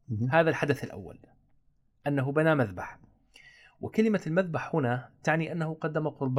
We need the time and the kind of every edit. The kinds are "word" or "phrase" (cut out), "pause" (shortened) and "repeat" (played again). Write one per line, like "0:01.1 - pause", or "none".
none